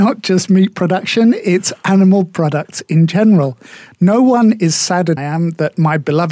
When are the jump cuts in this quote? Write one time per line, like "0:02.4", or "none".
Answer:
0:05.2